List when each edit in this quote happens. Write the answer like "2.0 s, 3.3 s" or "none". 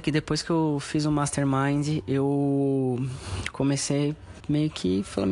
4.4 s